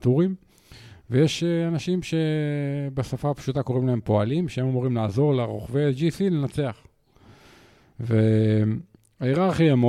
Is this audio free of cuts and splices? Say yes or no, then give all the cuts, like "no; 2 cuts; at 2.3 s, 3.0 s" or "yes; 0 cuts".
yes; 0 cuts